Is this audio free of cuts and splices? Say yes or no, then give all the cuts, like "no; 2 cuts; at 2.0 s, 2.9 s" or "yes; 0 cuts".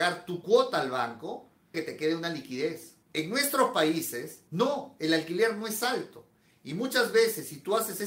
no; 3 cuts; at 1.7 s, 3.0 s, 4.5 s